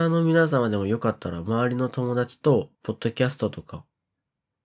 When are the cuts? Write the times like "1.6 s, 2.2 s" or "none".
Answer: 2.7 s

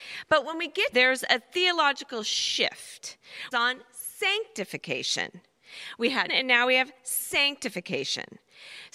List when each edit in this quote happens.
0.9 s, 3.5 s, 6.3 s

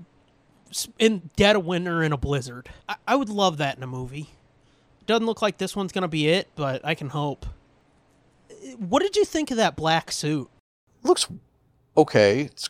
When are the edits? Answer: 2.8 s

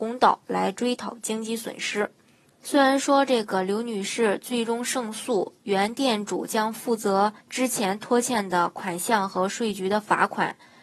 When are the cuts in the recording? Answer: 2.5 s, 7.4 s

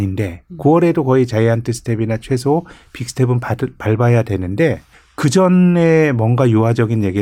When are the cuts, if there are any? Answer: 4.9 s

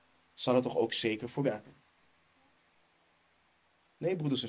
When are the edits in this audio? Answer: 1.4 s

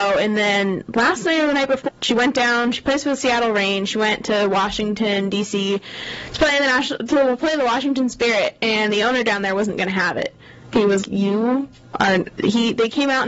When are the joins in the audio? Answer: 1.9 s, 11.0 s

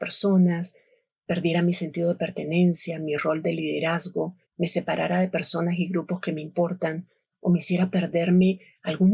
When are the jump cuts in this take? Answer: 4.4 s

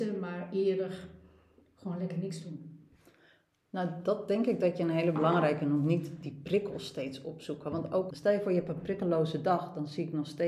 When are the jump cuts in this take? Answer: 8.1 s

